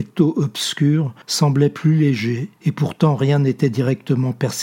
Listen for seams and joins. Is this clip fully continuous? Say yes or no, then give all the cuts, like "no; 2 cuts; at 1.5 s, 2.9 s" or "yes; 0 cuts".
no; 2 cuts; at 1.2 s, 2.6 s